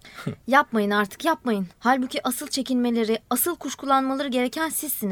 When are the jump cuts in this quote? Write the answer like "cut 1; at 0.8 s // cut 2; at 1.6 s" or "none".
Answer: cut 1; at 1.7 s